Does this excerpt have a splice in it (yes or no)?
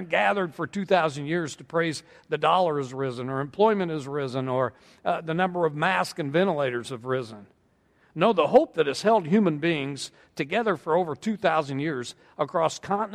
no